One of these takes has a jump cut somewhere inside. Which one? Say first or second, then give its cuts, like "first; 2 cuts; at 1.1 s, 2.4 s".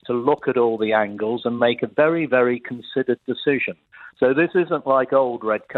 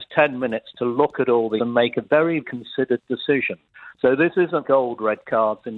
second; 3 cuts; at 1.6 s, 2.4 s, 4.6 s